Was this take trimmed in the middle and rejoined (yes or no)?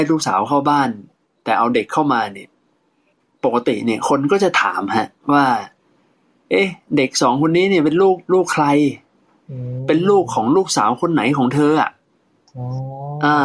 yes